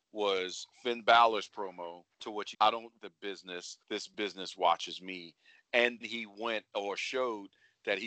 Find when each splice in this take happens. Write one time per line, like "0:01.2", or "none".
0:02.1
0:02.5
0:03.0
0:03.8
0:06.0